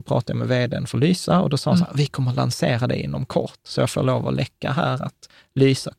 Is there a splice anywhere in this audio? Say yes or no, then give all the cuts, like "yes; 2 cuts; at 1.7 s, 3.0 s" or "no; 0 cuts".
no; 0 cuts